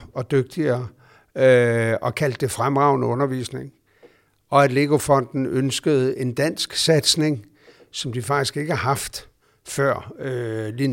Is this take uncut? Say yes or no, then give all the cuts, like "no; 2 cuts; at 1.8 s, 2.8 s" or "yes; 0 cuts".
yes; 0 cuts